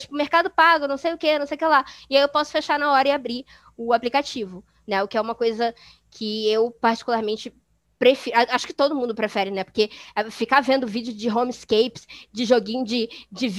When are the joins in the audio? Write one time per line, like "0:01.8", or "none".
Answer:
none